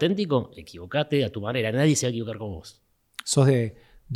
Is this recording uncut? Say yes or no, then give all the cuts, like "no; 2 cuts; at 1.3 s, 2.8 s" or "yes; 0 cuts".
yes; 0 cuts